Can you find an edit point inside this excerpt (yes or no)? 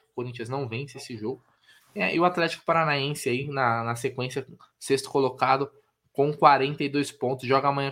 no